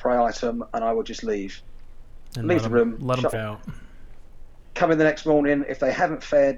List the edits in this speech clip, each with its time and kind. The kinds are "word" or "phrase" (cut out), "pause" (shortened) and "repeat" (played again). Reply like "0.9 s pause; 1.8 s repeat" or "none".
3.3 s word

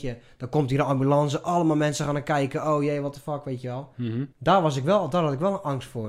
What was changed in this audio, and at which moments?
4.3 s pause

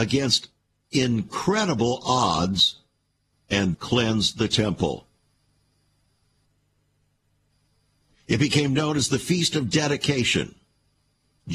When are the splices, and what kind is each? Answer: 3.3 s phrase; 3.7 s word

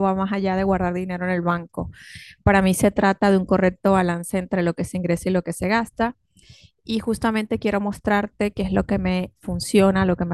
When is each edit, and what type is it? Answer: none

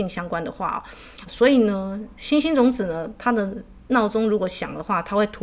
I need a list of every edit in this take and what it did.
1.3 s word; 2.2 s word

